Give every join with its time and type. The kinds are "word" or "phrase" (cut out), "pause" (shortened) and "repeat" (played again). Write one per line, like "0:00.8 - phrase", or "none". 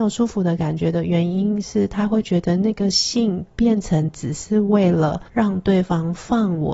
0:05.3 - pause

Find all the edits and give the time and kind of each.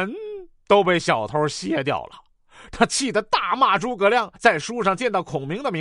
0:04.4 - pause

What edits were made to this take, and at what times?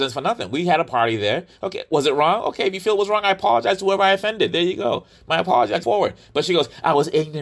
0:05.8 - word

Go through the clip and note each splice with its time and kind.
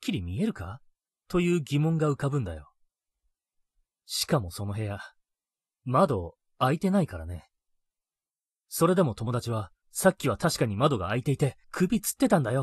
0:09.8 - pause
0:11.6 - pause

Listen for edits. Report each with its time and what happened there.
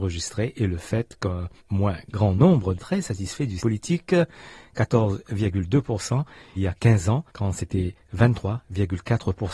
0:01.6 - pause
0:02.8 - phrase
0:03.6 - word
0:06.5 - word
0:07.3 - pause

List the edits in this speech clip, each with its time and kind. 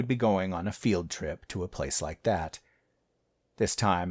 none

